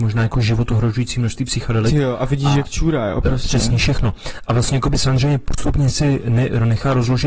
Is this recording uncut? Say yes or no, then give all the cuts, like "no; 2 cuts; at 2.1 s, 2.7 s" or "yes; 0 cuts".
yes; 0 cuts